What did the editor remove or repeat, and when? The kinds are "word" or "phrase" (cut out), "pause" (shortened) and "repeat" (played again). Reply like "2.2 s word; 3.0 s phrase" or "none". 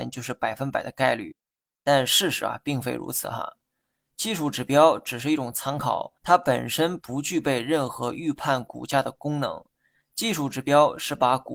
6.2 s pause